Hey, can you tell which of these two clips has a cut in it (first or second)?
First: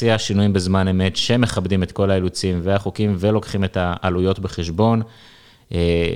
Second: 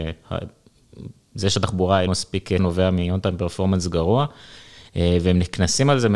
second